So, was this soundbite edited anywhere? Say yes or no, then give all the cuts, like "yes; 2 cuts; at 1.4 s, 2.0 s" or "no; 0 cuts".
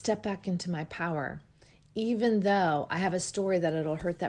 no; 0 cuts